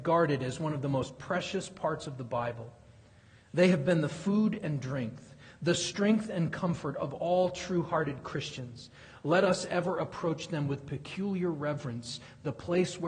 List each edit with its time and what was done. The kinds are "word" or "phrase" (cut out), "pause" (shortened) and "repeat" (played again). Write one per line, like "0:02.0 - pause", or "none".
none